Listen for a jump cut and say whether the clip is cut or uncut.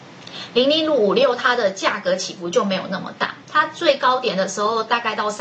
cut